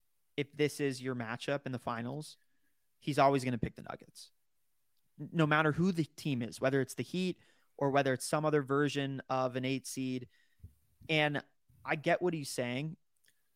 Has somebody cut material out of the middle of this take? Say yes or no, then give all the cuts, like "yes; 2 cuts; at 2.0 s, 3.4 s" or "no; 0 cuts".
no; 0 cuts